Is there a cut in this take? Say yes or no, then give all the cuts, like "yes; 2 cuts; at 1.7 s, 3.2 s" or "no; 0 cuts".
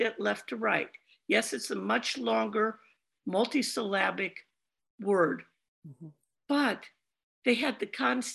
no; 0 cuts